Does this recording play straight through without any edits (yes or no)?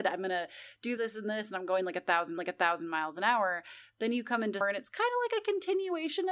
no